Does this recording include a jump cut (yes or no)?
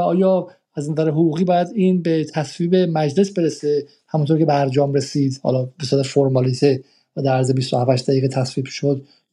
no